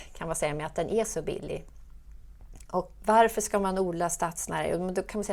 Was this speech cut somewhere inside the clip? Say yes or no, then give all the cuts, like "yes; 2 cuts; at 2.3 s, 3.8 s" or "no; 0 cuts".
yes; 1 cut; at 3.0 s